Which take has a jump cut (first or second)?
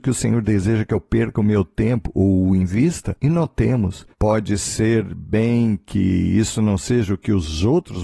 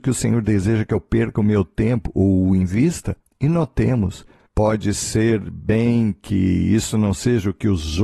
first